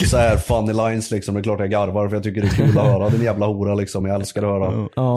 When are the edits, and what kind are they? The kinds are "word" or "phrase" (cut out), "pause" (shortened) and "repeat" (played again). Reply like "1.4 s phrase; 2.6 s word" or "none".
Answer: none